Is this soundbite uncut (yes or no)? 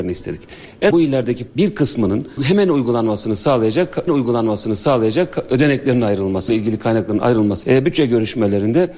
no